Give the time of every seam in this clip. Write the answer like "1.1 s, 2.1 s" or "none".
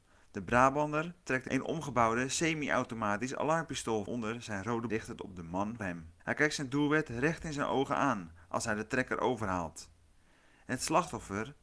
4.1 s, 4.9 s, 5.8 s, 6.2 s